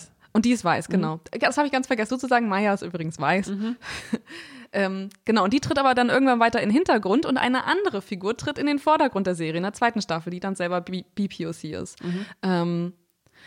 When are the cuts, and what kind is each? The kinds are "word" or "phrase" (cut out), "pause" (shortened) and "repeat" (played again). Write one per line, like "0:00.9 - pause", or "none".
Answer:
0:02.1 - word